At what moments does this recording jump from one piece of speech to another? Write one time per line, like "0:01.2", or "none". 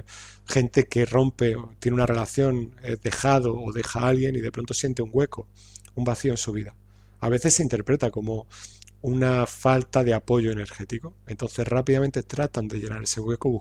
none